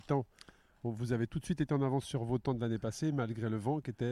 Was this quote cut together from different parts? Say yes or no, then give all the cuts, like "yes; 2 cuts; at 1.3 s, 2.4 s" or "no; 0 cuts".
no; 0 cuts